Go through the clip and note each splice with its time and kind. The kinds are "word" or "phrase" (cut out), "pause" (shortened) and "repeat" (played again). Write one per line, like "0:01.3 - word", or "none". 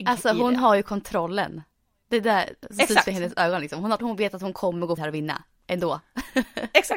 0:04.0 - word
0:05.0 - word